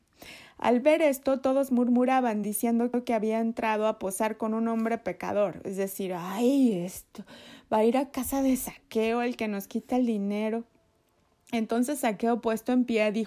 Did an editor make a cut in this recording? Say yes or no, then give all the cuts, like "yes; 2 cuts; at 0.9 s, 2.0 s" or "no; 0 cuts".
no; 0 cuts